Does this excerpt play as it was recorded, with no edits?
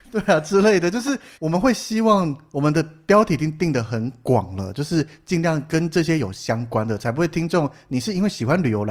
no; 1 cut; at 1.3 s

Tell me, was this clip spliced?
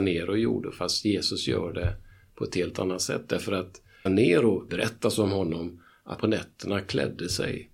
yes; 3 cuts; at 4.1 s, 4.7 s, 6.2 s

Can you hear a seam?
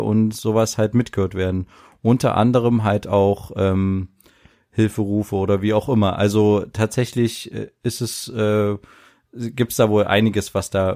no; 0 cuts

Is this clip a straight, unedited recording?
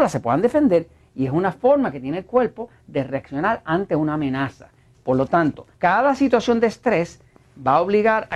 no; 1 cut; at 5.7 s

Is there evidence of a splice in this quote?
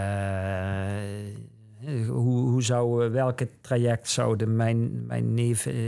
no; 0 cuts

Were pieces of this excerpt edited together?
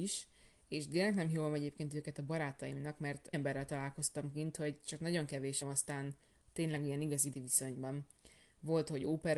yes; 3 cuts; at 3.3 s, 5.6 s, 7.3 s

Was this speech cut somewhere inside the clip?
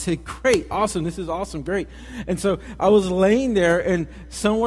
no; 0 cuts

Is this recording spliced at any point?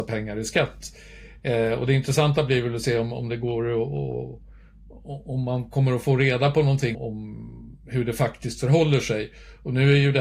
yes; 1 cut; at 6.9 s

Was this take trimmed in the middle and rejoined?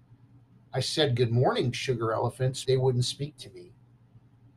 yes; 2 cuts; at 1.7 s, 2.6 s

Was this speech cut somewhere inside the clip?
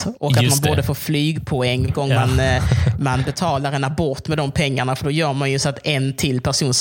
yes; 1 cut; at 1.9 s

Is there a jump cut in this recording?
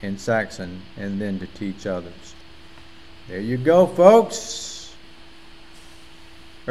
no; 0 cuts

